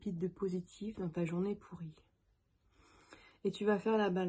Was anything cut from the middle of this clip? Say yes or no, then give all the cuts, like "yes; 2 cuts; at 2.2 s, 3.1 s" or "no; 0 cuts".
no; 0 cuts